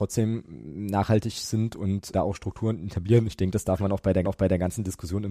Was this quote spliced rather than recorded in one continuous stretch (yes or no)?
yes